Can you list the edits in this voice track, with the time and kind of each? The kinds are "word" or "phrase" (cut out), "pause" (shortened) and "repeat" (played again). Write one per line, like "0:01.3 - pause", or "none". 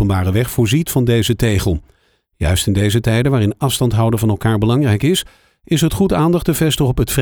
none